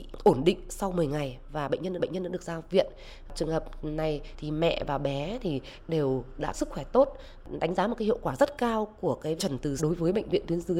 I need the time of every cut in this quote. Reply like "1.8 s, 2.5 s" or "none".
2.0 s, 6.5 s, 9.4 s, 9.8 s